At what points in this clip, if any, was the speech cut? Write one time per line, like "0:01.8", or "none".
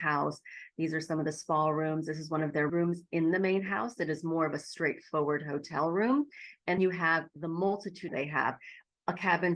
0:02.7
0:06.8
0:08.1